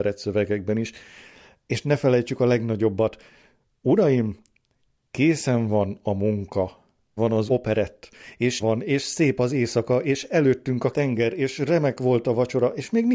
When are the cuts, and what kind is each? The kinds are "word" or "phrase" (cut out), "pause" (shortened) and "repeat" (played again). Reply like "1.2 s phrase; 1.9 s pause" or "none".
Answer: 7.2 s word; 7.5 s word; 8.6 s word; 10.9 s word